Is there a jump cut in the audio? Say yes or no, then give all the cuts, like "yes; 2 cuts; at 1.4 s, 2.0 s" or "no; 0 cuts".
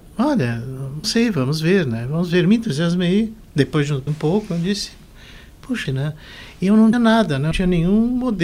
yes; 5 cuts; at 1.0 s, 4.1 s, 5.8 s, 6.9 s, 7.5 s